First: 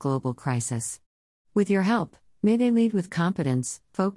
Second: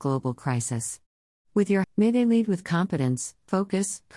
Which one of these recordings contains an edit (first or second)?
second